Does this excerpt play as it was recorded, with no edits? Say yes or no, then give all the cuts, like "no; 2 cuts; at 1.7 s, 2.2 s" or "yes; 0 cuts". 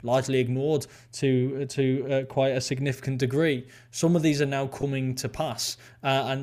yes; 0 cuts